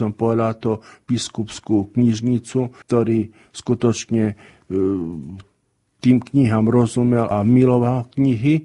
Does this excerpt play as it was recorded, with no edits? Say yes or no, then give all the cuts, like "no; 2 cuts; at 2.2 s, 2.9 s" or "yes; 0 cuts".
no; 2 cuts; at 2.8 s, 7.3 s